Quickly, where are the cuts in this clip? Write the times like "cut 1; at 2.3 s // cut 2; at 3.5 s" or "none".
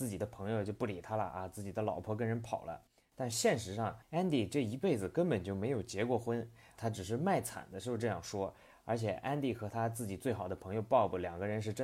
none